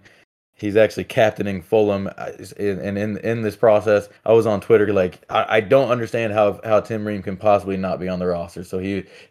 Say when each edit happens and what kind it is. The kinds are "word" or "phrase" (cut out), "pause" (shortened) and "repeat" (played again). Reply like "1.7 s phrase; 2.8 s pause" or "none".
4.2 s pause